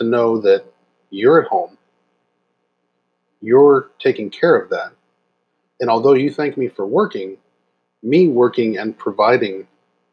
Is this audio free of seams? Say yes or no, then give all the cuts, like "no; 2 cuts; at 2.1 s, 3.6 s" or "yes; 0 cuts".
yes; 0 cuts